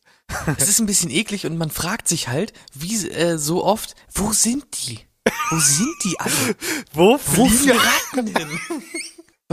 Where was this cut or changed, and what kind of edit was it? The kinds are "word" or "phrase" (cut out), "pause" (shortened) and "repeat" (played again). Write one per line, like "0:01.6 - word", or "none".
0:07.7 - word